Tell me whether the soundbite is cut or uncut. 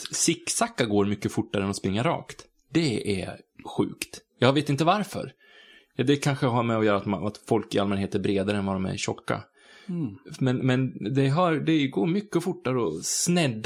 uncut